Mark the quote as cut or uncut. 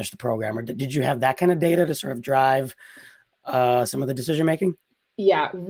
uncut